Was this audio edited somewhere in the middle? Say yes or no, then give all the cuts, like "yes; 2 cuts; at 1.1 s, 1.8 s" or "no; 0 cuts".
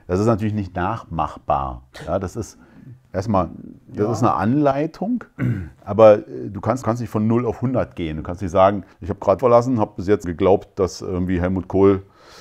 yes; 4 cuts; at 6.8 s, 8.9 s, 9.4 s, 10.2 s